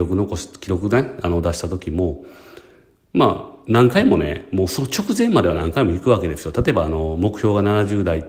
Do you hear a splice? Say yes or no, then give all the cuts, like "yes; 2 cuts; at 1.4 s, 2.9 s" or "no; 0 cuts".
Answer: no; 0 cuts